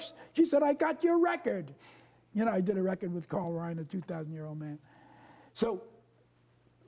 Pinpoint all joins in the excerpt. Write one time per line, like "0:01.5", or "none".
none